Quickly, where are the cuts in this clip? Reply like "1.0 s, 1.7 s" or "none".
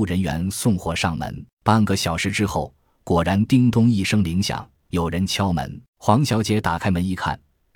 1.5 s, 5.9 s